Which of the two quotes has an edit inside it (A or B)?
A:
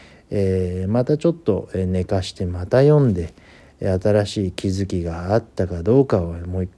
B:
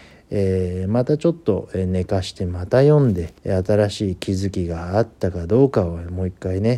B